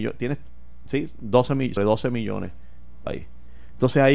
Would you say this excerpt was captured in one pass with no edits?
no; 2 cuts; at 1.8 s, 3.1 s

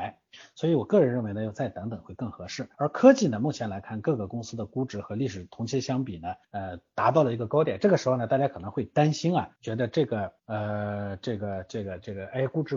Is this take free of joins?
no; 4 cuts; at 2.7 s, 6.4 s, 9.6 s, 10.4 s

